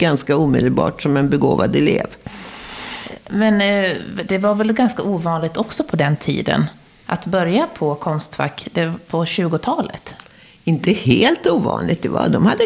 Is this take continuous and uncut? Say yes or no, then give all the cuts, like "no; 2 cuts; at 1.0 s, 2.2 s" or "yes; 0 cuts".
yes; 0 cuts